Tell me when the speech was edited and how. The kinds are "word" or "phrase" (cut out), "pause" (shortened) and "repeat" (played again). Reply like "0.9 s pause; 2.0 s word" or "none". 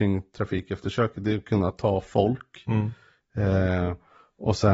none